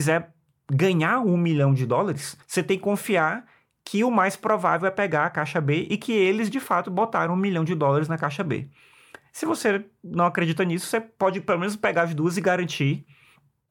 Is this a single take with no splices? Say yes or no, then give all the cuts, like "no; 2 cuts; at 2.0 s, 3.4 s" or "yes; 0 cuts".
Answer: no; 1 cut; at 2.4 s